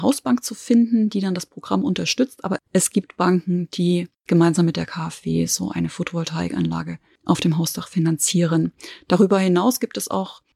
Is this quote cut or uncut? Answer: uncut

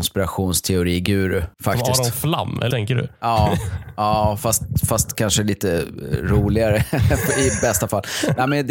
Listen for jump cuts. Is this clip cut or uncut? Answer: cut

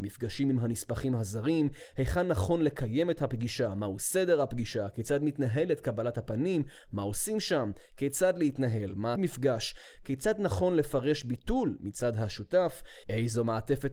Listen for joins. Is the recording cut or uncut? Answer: cut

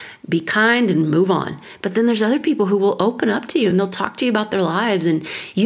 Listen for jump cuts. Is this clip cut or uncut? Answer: uncut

